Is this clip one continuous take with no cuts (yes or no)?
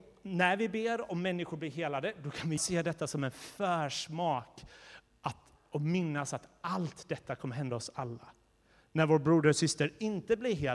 no